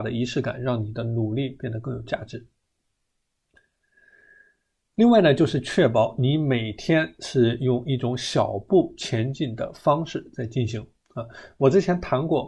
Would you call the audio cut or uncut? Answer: uncut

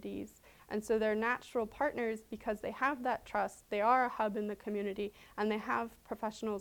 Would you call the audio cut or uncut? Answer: uncut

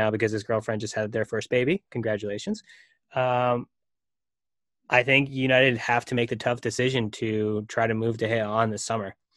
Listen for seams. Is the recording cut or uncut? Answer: uncut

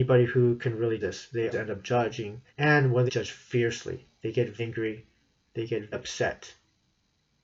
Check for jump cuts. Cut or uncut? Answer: cut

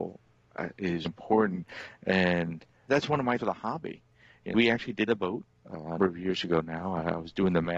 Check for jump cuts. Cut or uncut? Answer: cut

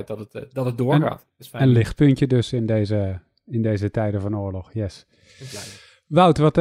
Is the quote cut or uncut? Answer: uncut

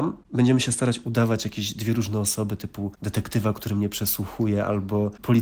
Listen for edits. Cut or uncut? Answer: uncut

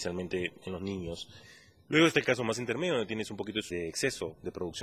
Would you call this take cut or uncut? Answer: uncut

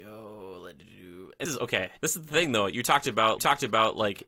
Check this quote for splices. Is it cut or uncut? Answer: cut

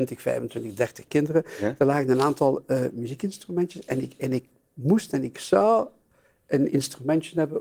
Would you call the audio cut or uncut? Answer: uncut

